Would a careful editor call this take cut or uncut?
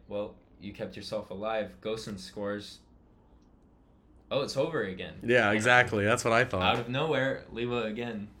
uncut